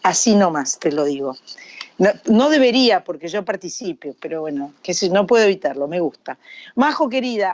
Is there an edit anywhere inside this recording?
yes; 1 cut; at 4.8 s

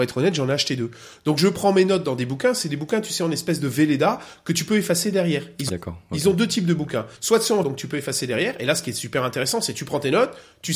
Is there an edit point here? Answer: yes; 3 cuts; at 5.7 s, 7.2 s, 7.6 s

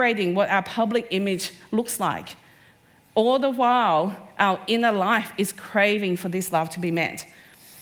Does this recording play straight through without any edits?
yes; 0 cuts

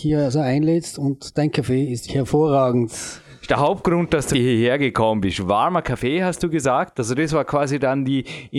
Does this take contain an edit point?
yes; 2 cuts; at 2.1 s, 4.3 s

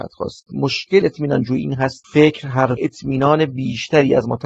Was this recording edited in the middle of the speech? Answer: yes; 3 cuts; at 1.0 s, 2.0 s, 2.8 s

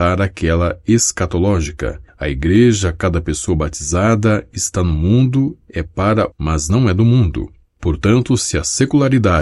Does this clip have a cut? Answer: yes; 1 cut; at 6.3 s

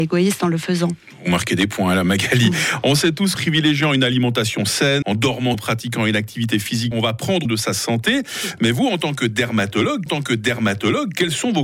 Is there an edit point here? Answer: yes; 6 cuts; at 3.3 s, 5.0 s, 5.5 s, 6.9 s, 7.5 s, 10.1 s

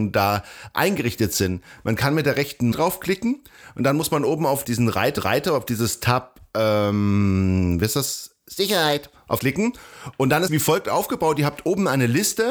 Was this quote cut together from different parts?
yes; 5 cuts; at 2.7 s, 4.6 s, 5.2 s, 9.4 s, 10.5 s

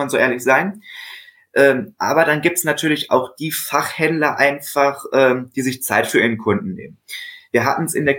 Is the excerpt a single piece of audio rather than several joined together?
yes; 0 cuts

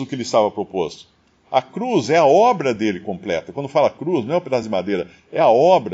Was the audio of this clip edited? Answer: no; 0 cuts

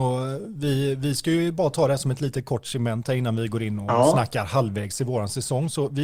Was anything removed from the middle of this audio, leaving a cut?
no; 0 cuts

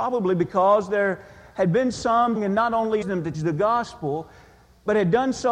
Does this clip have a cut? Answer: yes; 3 cuts; at 2.4 s, 3.0 s, 3.3 s

